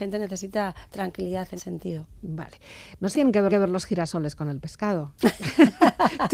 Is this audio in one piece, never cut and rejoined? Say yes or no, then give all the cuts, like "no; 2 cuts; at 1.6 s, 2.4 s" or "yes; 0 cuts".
no; 3 cuts; at 1.6 s, 3.1 s, 3.5 s